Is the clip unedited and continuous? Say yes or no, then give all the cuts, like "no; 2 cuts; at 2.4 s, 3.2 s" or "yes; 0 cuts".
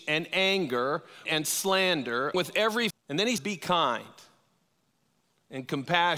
no; 4 cuts; at 1.3 s, 2.3 s, 2.9 s, 3.4 s